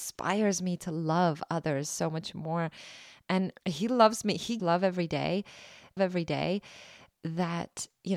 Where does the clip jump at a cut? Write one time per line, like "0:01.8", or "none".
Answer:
0:03.6
0:04.6
0:06.0